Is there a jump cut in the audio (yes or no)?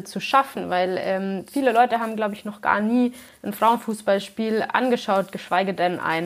no